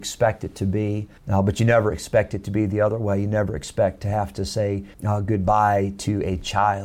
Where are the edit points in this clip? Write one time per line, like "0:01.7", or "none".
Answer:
0:01.2
0:04.9